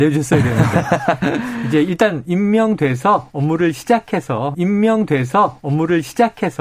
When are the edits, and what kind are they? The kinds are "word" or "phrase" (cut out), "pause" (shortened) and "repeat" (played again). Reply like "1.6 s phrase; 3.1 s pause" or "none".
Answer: 4.5 s repeat

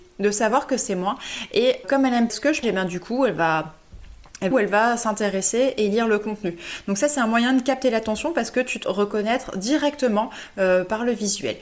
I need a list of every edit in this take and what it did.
1.8 s word; 2.3 s word; 2.6 s word; 4.5 s phrase; 8.8 s word

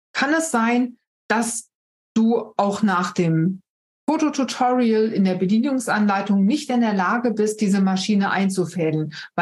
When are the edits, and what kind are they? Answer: none

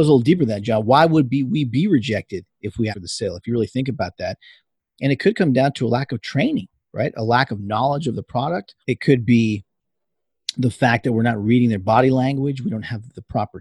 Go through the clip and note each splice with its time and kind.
2.9 s word; 8.8 s pause

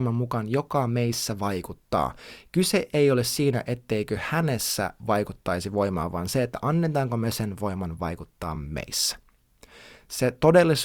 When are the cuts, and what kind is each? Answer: none

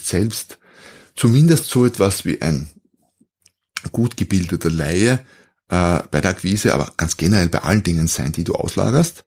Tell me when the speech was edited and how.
none

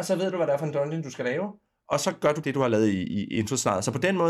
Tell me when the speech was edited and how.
2.4 s word

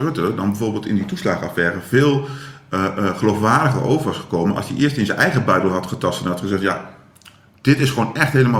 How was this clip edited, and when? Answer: none

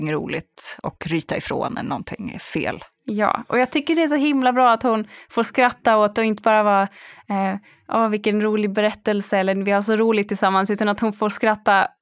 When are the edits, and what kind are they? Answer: none

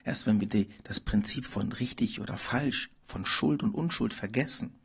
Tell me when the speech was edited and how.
none

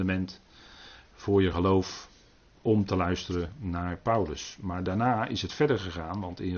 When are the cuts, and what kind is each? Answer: none

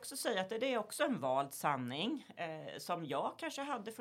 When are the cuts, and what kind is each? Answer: none

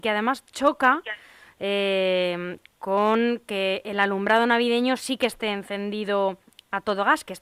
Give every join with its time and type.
none

